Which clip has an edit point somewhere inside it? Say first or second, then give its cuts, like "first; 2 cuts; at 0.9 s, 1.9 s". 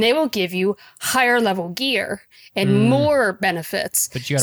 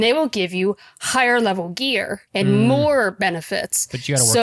second; 1 cut; at 2.3 s